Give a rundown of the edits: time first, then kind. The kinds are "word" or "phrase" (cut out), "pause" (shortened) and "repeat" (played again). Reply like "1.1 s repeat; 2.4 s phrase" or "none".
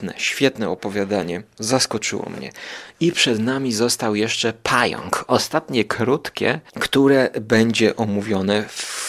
none